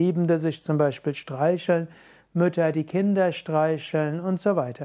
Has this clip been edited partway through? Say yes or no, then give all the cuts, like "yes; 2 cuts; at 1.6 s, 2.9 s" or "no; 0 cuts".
no; 0 cuts